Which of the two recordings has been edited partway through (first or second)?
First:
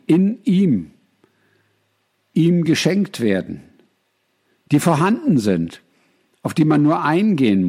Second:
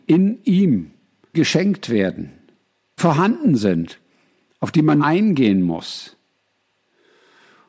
second